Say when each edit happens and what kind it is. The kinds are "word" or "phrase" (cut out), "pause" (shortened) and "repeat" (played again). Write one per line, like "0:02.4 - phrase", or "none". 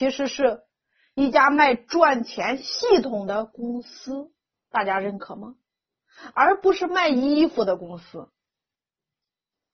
none